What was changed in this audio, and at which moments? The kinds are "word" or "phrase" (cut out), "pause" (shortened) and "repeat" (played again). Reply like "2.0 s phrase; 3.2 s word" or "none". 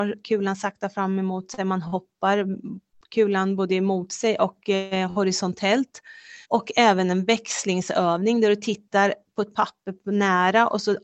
6.4 s pause

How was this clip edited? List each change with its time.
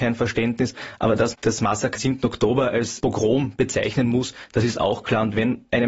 1.3 s word; 2.0 s word; 3.0 s word

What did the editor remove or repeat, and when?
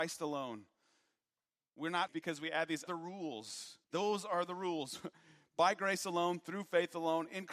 2.1 s word; 2.9 s word; 3.8 s pause

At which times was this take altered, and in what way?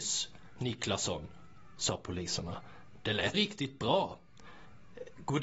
3.3 s word

